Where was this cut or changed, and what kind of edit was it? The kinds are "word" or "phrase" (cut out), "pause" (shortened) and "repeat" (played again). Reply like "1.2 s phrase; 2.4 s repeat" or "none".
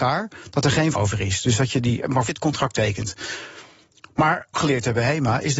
0.9 s word; 2.3 s word; 4.5 s phrase